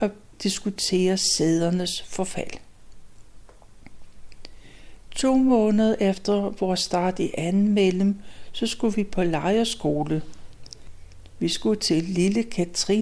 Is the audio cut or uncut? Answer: uncut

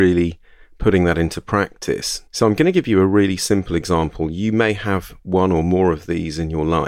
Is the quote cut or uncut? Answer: cut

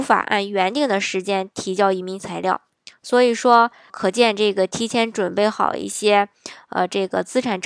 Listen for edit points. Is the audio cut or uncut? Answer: cut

